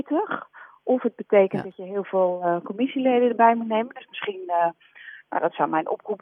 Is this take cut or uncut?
uncut